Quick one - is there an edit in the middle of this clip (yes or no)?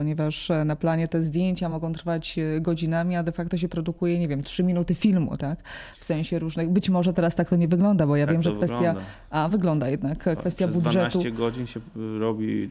no